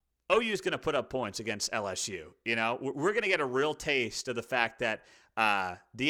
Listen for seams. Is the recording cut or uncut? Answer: uncut